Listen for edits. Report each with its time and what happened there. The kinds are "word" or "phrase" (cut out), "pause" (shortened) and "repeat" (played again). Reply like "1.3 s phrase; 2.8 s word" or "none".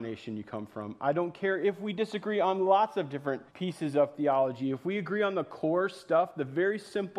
3.5 s pause